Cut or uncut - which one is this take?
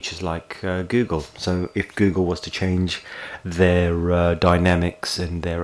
uncut